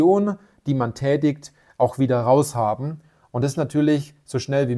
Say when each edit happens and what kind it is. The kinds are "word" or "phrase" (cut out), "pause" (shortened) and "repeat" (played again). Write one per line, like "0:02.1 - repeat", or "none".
none